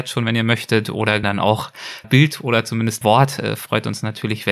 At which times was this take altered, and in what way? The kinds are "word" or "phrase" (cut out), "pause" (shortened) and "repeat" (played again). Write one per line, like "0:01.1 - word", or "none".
0:01.2 - word
0:02.0 - word
0:03.0 - word